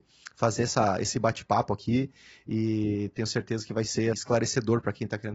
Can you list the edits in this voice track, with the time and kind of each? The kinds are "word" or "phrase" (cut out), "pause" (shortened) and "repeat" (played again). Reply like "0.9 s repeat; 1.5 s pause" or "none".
4.1 s word